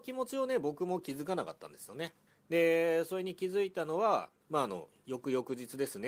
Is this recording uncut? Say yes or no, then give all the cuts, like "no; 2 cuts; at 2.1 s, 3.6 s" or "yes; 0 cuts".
no; 2 cuts; at 2.3 s, 4.4 s